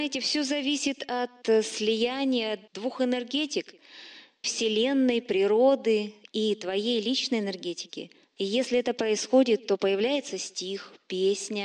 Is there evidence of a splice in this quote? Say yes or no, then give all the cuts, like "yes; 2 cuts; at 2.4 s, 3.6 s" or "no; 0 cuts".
yes; 3 cuts; at 2.7 s, 4.4 s, 8.2 s